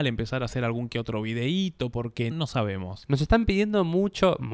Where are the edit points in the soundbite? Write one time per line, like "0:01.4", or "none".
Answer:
0:02.3

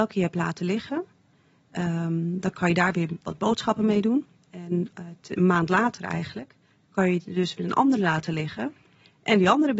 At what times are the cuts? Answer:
none

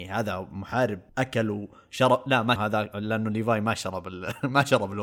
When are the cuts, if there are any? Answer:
0:01.1
0:02.6

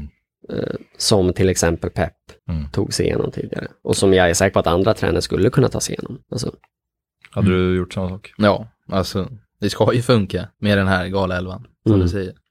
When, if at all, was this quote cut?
0:02.4
0:06.2
0:10.5

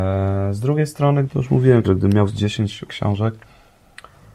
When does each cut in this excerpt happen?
0:01.3
0:01.8
0:02.3
0:02.9

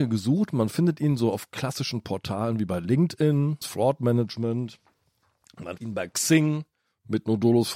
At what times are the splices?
0:03.6
0:05.8
0:06.8

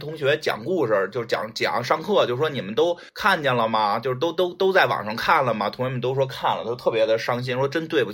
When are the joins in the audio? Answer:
0:03.1

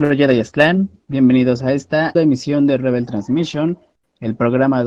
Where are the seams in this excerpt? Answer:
0:02.1

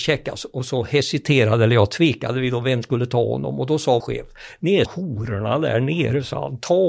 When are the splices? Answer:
0:02.8
0:04.0
0:04.9

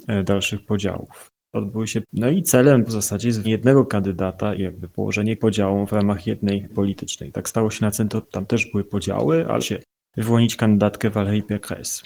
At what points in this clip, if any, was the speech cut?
0:02.0
0:02.9
0:03.4
0:04.6
0:05.4
0:06.7
0:08.2
0:09.6

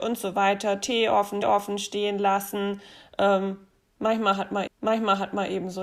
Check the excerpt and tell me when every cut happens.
0:01.4
0:04.7

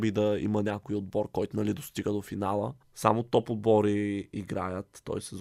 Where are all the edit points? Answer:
0:02.8

